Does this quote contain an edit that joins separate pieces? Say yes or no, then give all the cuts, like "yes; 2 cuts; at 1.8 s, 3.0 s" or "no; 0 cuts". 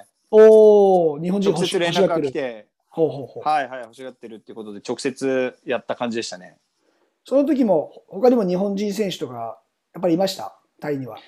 no; 0 cuts